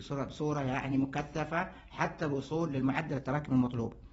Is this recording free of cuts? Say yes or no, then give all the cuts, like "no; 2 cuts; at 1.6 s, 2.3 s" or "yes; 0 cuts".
yes; 0 cuts